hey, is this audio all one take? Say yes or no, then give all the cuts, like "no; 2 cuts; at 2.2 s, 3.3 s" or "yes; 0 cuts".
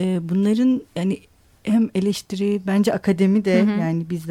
yes; 0 cuts